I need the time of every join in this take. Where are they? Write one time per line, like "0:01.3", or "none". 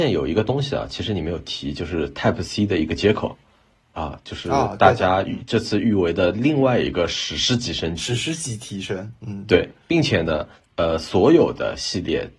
none